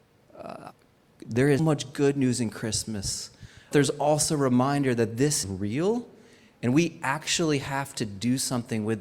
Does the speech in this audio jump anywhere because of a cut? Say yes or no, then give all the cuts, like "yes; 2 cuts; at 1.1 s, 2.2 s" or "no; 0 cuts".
yes; 3 cuts; at 1.6 s, 3.7 s, 5.4 s